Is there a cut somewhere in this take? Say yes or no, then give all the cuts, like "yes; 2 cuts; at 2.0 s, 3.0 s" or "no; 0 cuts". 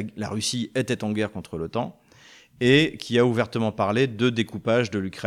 no; 0 cuts